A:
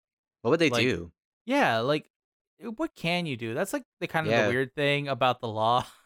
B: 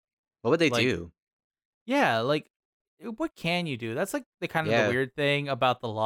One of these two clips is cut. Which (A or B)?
A